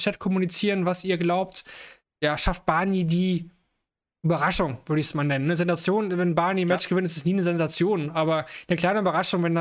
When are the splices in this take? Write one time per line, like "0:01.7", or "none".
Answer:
none